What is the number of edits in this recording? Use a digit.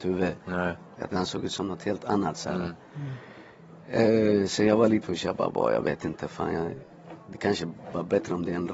2